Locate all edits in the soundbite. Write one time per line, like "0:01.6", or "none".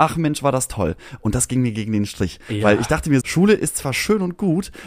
0:03.2